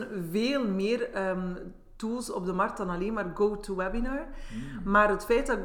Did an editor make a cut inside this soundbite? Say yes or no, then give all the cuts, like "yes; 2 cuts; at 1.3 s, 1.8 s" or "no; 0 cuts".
no; 0 cuts